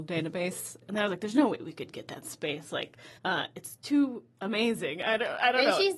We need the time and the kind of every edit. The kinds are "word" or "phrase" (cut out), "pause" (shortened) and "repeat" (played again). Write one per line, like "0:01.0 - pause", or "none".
0:03.2 - pause